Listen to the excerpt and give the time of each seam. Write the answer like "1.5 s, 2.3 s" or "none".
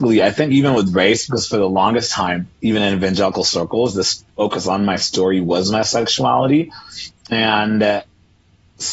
2.5 s, 4.3 s